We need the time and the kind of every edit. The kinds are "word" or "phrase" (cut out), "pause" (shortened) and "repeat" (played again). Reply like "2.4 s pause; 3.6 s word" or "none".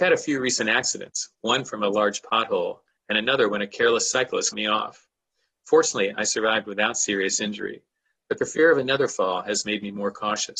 4.5 s word